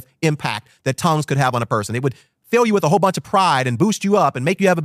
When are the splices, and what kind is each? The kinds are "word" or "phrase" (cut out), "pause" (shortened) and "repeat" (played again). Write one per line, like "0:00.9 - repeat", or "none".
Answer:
none